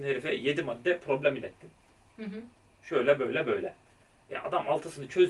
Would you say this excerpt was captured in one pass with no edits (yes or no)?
yes